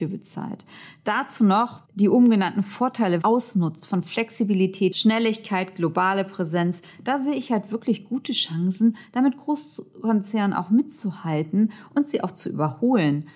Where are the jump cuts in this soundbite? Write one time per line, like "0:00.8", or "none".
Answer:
0:01.9
0:03.2